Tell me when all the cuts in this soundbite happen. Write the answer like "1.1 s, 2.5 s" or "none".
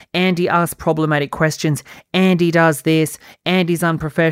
none